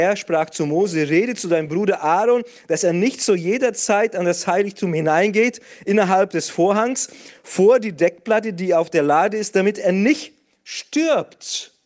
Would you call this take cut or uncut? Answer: uncut